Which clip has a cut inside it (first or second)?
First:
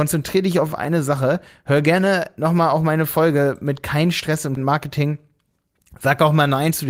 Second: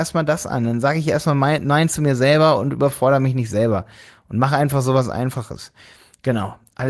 first